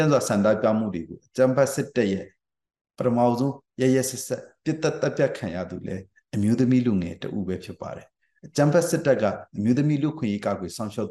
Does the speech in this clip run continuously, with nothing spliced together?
yes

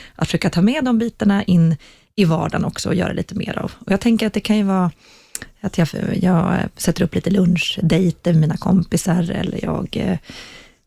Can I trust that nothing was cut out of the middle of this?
yes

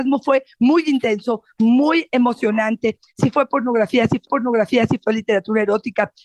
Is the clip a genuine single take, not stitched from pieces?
no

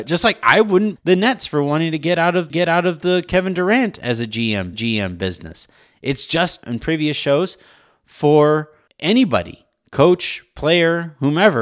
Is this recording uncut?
no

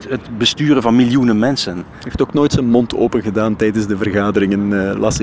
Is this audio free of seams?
yes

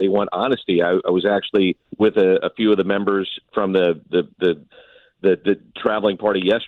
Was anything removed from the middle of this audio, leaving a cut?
yes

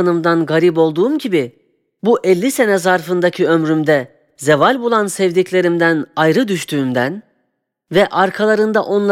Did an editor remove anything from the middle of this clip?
no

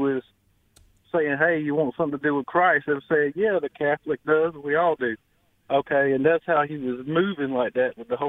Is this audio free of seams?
yes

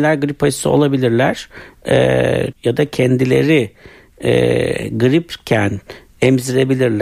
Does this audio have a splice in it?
yes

